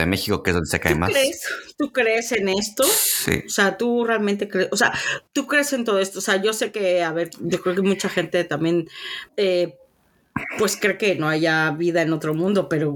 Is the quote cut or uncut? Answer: cut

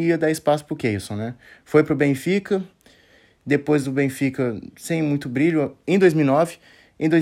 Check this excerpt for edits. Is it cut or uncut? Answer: uncut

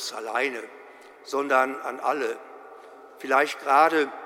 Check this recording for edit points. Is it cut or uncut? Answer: uncut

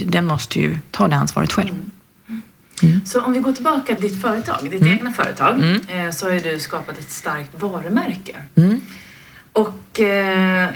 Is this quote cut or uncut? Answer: cut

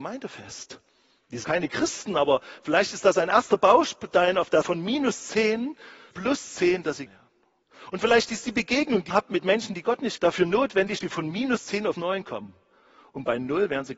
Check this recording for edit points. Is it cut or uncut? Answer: cut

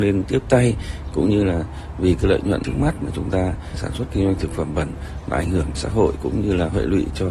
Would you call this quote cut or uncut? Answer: cut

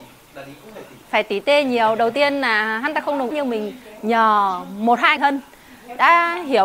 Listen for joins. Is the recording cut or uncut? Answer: cut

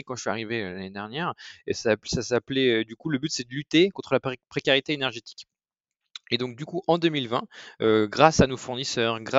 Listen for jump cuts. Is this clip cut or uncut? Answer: uncut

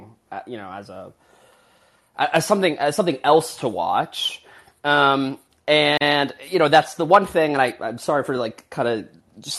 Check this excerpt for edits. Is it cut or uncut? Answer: uncut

